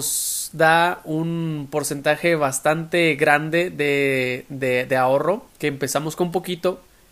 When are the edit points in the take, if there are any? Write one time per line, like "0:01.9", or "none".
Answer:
0:05.5